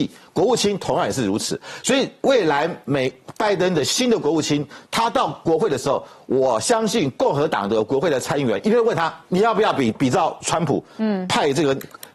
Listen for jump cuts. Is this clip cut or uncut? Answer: cut